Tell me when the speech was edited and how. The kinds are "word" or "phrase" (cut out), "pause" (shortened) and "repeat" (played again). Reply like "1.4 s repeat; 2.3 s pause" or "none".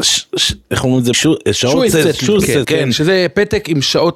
1.1 s word; 2.6 s word